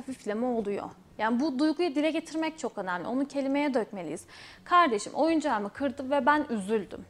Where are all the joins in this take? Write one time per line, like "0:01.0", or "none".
none